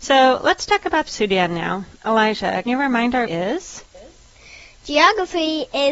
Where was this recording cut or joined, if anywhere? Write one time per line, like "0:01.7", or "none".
0:01.1
0:02.7
0:03.3